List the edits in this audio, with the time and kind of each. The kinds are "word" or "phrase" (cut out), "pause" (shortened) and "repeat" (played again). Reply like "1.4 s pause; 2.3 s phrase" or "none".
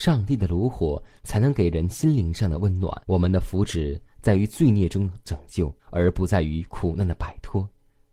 3.0 s pause; 5.8 s pause